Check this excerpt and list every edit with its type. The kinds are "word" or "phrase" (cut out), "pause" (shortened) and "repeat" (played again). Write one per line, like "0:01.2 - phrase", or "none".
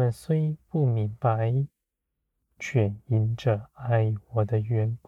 none